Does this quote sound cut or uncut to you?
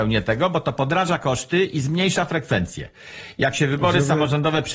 uncut